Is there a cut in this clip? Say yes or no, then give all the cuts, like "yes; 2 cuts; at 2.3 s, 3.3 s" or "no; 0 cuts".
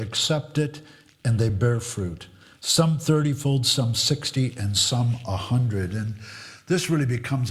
no; 0 cuts